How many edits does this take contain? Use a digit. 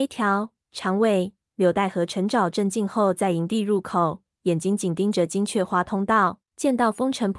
1